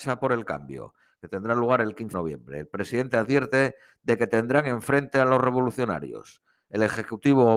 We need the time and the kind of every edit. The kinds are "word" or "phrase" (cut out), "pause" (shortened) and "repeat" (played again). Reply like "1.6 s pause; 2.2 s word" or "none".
2.1 s word